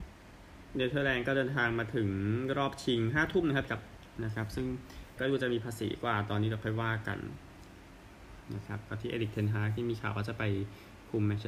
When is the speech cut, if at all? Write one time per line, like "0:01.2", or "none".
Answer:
0:03.7
0:04.2
0:05.2